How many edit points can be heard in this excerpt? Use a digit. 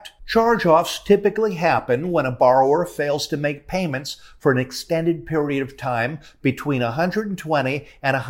0